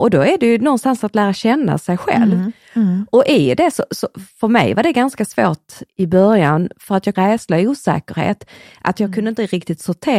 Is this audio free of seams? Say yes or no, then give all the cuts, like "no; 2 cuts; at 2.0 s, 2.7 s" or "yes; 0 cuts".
no; 2 cuts; at 5.9 s, 7.2 s